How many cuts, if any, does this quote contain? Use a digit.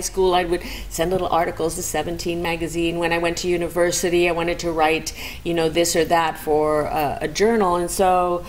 0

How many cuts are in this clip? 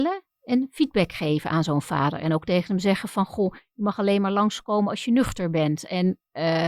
0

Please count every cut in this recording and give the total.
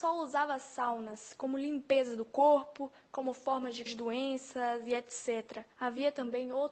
2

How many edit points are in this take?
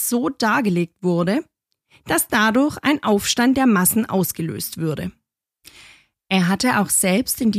0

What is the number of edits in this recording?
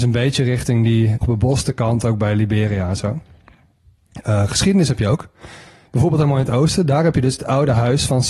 1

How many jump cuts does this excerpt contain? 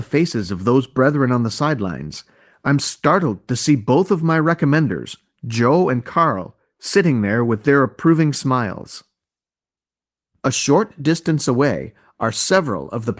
0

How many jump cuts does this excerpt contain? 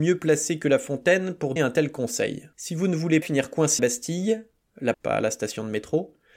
5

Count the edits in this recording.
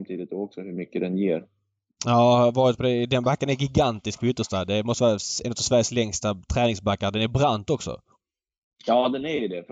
0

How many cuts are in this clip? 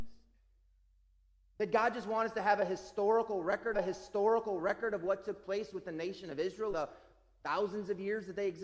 2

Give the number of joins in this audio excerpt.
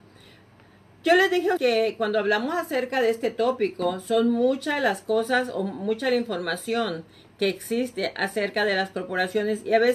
1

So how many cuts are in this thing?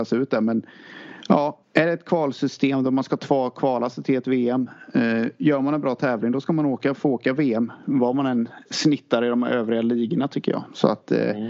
1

